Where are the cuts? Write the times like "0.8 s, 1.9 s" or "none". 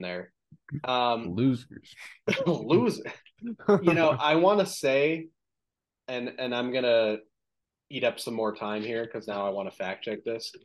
none